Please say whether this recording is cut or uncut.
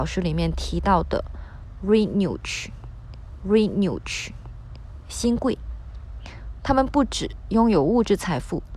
cut